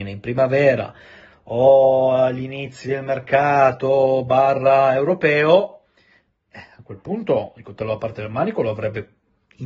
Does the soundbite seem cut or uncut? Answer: uncut